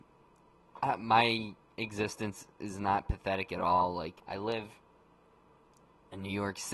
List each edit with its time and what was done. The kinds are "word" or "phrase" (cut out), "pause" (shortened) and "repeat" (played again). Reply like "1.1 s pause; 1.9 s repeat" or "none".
4.2 s pause

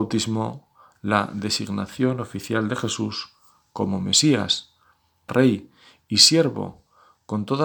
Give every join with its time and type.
5.3 s word

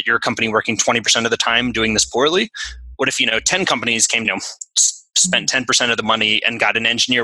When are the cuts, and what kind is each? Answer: 4.2 s phrase

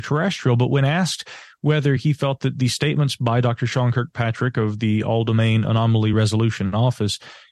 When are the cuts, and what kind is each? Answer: none

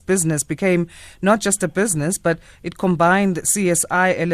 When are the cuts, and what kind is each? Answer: none

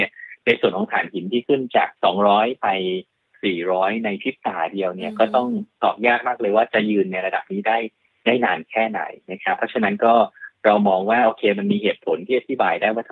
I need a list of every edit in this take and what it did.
2.0 s pause

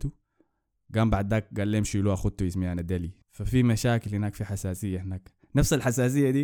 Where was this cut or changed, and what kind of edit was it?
3.2 s pause

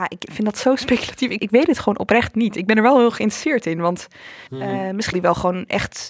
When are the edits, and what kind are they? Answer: 1.4 s word; 4.5 s pause; 5.1 s word

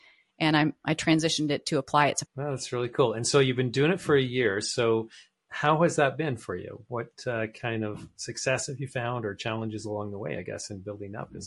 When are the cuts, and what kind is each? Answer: 2.3 s word

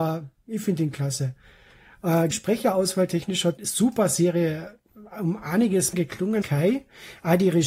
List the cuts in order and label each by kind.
2.3 s word; 3.6 s word; 5.9 s word; 6.4 s word

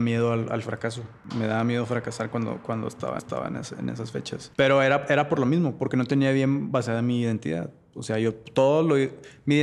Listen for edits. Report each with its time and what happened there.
3.2 s repeat

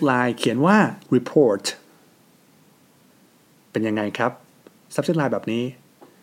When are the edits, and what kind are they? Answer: 1.0 s word

